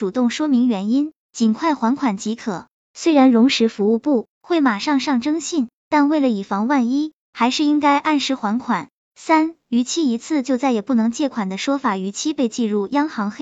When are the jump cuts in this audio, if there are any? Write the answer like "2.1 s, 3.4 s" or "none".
4.3 s